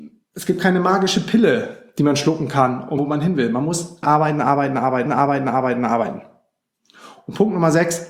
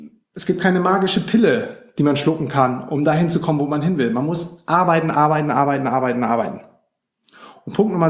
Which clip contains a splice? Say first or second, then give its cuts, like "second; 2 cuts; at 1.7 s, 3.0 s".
first; 3 cuts; at 3.0 s, 4.0 s, 5.1 s